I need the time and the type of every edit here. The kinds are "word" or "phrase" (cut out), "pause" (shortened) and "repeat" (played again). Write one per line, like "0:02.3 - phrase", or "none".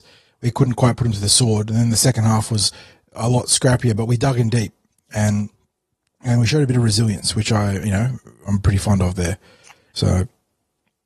none